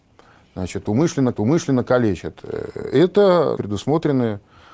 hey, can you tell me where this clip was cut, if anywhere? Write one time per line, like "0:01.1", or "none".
0:01.3
0:03.6